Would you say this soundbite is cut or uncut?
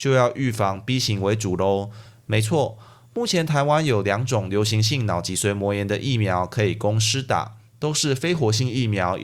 uncut